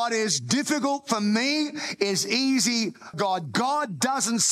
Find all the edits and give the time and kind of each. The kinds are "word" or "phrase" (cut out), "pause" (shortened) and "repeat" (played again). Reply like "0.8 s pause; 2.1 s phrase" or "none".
3.1 s word